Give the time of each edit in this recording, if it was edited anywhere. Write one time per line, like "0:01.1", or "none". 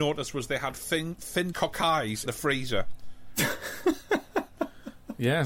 0:01.5
0:02.3

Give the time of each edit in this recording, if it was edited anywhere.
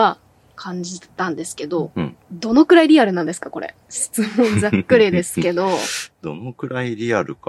0:02.2
0:03.8

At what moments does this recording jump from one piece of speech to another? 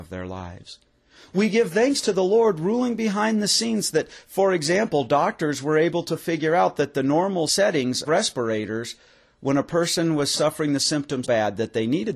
0:08.0
0:11.2

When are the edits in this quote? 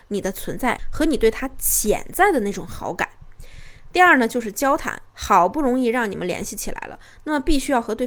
0:05.1

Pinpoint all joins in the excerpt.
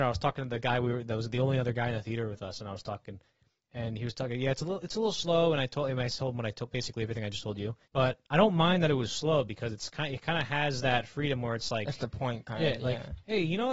0:07.8

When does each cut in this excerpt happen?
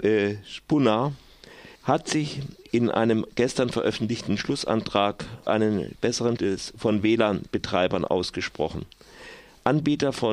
0:01.8
0:05.5
0:06.4

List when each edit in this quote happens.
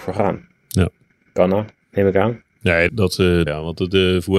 0:01.8
0:02.9
0:03.5

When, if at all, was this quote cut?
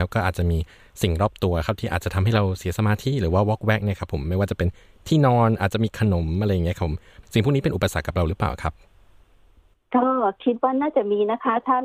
none

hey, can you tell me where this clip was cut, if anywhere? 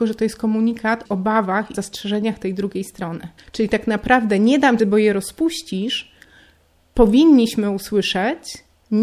0:01.1
0:01.7
0:03.4
0:04.8

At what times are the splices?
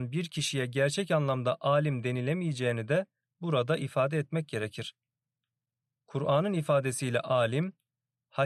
none

